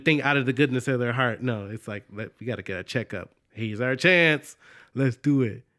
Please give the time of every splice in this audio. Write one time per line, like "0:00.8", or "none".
none